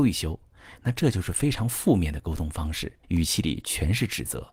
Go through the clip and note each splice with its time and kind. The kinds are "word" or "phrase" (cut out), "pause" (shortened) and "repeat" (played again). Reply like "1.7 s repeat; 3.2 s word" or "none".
3.0 s pause